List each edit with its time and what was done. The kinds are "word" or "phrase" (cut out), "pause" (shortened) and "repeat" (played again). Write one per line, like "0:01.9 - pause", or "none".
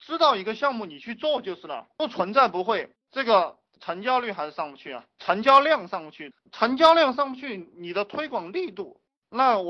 0:03.0 - pause